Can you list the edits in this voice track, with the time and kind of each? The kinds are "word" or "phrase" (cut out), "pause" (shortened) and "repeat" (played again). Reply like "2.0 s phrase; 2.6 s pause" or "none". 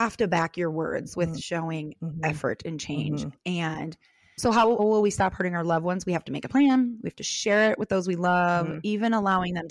4.4 s word; 4.8 s word